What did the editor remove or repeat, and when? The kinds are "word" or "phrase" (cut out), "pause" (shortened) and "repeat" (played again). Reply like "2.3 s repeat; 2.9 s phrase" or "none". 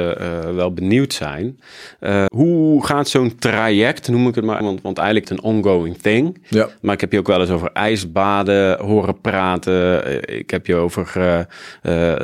2.3 s word; 4.6 s word; 5.2 s phrase